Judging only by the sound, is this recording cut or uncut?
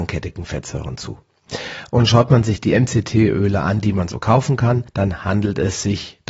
cut